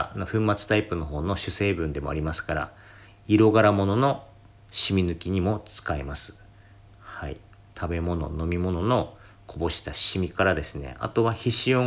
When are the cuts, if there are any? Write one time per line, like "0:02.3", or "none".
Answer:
none